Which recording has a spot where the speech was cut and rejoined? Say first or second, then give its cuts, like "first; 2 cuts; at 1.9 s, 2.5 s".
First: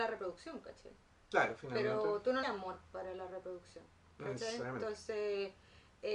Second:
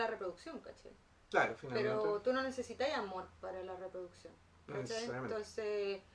first; 1 cut; at 2.4 s